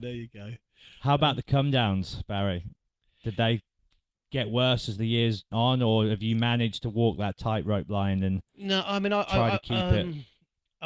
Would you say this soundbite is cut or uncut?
cut